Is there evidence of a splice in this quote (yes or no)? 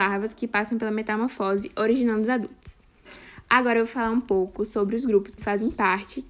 yes